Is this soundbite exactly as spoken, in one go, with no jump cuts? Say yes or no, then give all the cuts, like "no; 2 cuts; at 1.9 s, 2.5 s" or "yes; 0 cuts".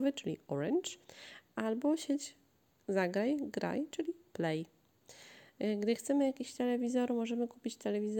yes; 0 cuts